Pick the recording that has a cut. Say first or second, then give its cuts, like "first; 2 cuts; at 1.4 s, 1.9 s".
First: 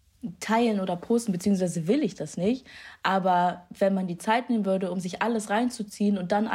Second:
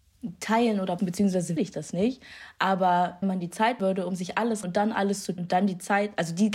second; 6 cuts; at 1.0 s, 1.6 s, 3.2 s, 3.8 s, 4.6 s, 5.4 s